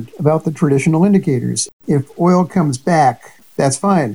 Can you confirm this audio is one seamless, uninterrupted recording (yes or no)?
yes